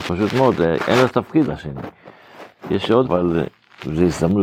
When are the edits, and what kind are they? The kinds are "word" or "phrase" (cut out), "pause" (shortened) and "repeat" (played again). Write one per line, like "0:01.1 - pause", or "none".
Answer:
0:01.5 - word
0:03.0 - word